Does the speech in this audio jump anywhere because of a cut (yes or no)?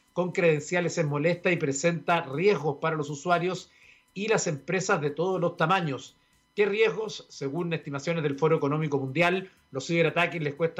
no